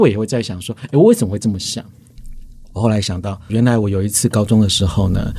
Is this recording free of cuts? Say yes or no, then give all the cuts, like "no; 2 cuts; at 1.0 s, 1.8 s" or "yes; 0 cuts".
no; 1 cut; at 3.5 s